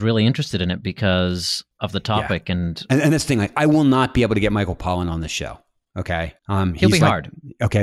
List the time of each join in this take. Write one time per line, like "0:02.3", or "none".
0:06.4